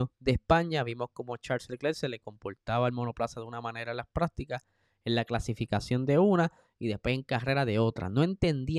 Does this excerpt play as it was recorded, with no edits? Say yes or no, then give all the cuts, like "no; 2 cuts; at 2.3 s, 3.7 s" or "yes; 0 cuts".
yes; 0 cuts